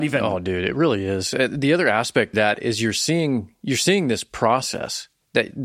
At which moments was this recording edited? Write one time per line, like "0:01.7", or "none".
0:02.3